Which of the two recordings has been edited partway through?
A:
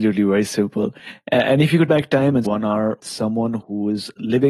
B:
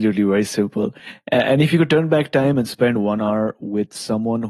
A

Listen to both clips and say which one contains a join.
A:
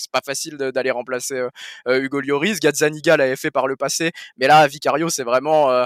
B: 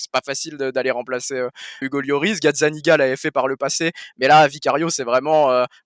B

